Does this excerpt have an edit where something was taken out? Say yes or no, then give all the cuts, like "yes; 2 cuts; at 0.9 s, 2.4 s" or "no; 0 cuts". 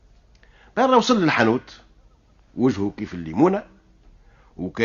no; 0 cuts